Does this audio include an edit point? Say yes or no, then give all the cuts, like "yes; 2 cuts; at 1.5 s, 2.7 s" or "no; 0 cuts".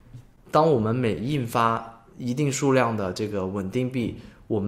yes; 1 cut; at 2.1 s